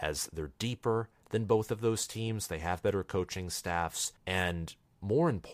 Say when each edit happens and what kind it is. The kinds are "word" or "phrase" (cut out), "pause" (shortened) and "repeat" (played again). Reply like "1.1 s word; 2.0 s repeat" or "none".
4.2 s pause